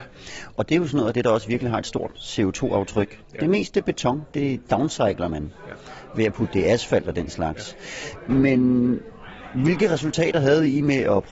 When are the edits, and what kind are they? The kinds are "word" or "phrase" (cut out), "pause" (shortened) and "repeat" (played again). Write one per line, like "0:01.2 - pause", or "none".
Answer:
none